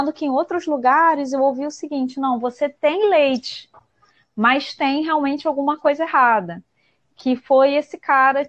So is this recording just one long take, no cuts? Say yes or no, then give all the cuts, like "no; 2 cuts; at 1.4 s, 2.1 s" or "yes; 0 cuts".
yes; 0 cuts